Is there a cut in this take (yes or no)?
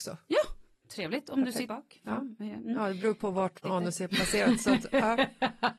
yes